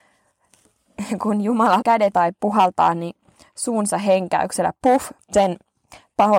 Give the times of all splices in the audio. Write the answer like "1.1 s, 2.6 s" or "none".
1.8 s, 2.1 s, 5.2 s